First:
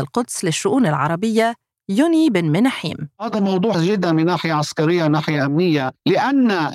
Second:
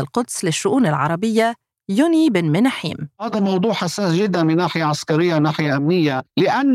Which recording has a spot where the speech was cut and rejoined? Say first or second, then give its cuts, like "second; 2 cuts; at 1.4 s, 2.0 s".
first; 1 cut; at 3.7 s